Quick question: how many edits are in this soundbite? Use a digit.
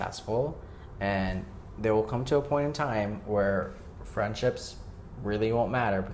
0